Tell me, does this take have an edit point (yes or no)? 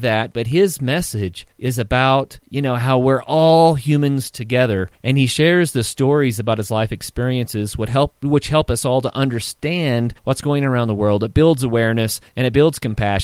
yes